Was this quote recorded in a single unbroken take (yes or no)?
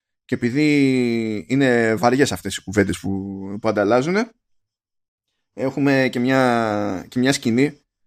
yes